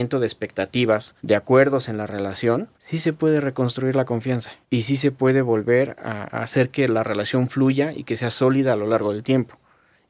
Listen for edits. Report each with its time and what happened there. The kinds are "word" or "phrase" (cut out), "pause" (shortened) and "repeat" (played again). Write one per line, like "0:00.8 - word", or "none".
0:01.2 - pause
0:02.7 - pause
0:04.6 - pause
0:06.3 - word

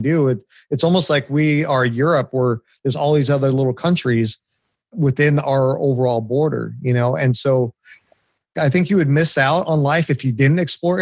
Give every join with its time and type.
none

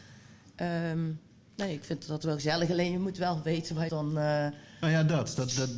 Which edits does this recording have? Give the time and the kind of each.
0:03.9 - phrase

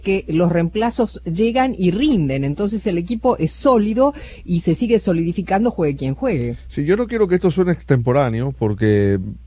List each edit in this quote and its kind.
none

